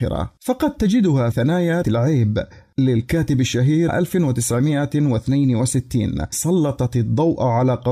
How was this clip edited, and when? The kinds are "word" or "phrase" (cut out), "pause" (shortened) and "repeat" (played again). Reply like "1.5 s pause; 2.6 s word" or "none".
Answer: 1.3 s word; 1.8 s word; 3.9 s phrase; 6.3 s word